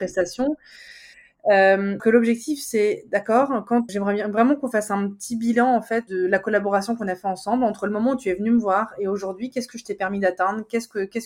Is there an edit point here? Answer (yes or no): yes